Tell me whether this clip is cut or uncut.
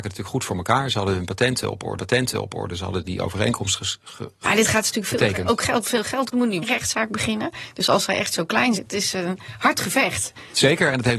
cut